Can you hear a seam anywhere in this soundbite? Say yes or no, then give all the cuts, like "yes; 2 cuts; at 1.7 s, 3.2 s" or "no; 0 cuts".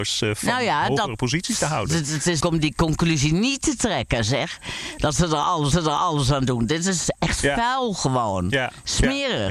yes; 2 cuts; at 2.4 s, 5.7 s